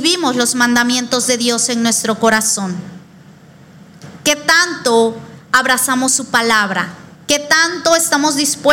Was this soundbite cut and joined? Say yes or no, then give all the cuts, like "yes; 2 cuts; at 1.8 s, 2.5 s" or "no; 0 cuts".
yes; 1 cut; at 7.1 s